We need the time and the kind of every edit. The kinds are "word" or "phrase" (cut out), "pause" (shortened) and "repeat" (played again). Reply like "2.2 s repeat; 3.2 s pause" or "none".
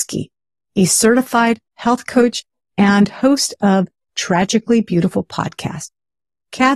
none